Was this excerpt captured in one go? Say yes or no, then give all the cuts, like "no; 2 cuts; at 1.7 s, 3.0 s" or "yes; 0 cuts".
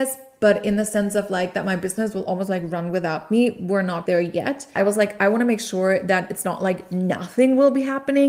no; 2 cuts; at 4.1 s, 4.8 s